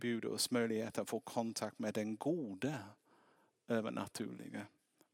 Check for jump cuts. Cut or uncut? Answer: uncut